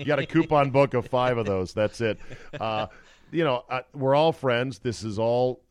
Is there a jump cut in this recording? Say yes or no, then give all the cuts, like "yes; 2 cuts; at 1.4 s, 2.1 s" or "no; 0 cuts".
no; 0 cuts